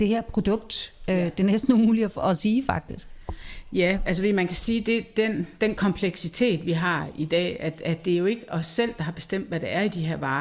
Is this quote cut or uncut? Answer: uncut